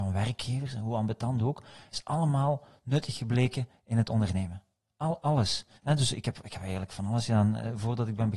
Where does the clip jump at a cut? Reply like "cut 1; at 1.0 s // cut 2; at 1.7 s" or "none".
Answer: cut 1; at 5.8 s